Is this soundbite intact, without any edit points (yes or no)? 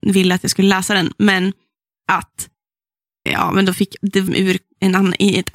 no